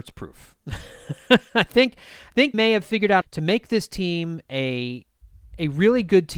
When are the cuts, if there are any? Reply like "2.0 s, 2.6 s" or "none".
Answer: 2.5 s, 3.2 s

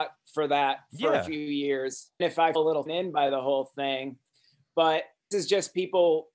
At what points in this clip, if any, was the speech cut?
2.2 s, 2.5 s, 2.9 s, 5.3 s

